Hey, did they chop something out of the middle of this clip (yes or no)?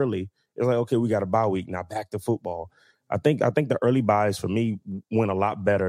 no